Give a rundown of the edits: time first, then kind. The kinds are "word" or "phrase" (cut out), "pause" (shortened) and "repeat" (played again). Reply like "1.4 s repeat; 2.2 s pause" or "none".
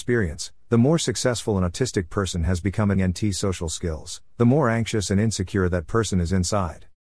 3.0 s word